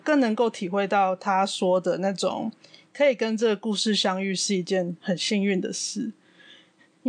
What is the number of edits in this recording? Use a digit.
0